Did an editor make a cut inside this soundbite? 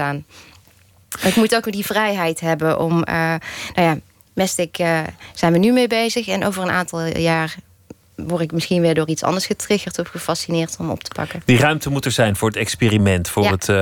no; 0 cuts

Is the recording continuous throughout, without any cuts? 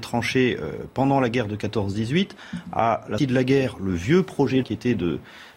no; 2 cuts; at 3.2 s, 4.6 s

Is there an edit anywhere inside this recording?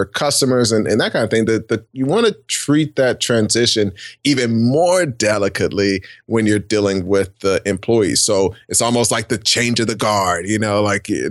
no; 0 cuts

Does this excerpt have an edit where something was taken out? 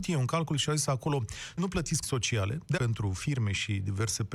yes; 3 cuts; at 1.6 s, 2.0 s, 2.8 s

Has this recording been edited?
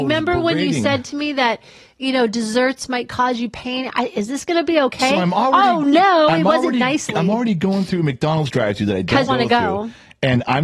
yes; 1 cut; at 9.3 s

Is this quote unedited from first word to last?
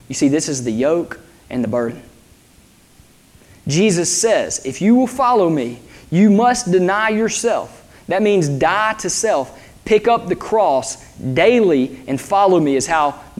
yes; 0 cuts

